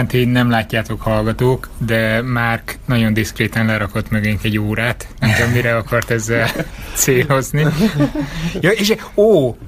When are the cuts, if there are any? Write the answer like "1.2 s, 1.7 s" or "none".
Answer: none